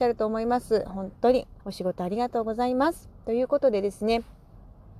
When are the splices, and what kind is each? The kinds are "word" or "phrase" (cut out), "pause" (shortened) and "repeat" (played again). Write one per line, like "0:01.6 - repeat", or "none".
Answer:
0:01.6 - pause